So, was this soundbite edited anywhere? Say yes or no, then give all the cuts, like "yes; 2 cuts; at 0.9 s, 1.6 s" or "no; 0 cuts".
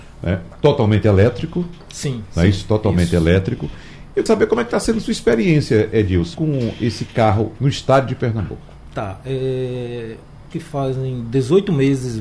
yes; 4 cuts; at 4.3 s, 6.3 s, 7.6 s, 10.5 s